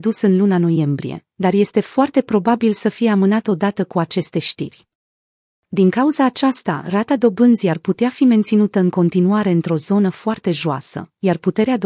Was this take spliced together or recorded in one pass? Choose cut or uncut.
uncut